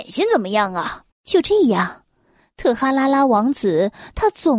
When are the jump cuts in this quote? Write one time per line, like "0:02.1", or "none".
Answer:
0:01.1